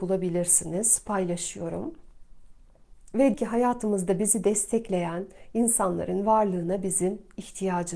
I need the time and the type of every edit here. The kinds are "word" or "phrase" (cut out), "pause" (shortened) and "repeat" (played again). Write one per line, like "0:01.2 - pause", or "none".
0:03.3 - word